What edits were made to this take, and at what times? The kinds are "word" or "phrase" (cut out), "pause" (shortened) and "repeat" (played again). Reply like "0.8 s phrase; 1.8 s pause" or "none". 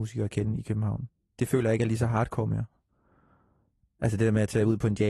none